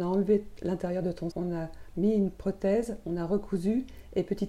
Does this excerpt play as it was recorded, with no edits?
no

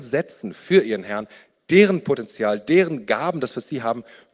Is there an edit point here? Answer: no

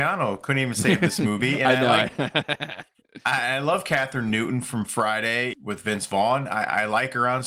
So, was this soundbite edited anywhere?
yes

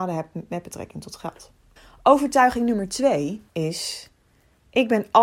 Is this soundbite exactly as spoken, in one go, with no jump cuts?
no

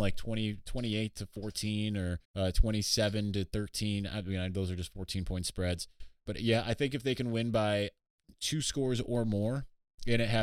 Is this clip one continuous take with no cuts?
no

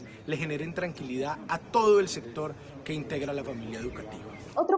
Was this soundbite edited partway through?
no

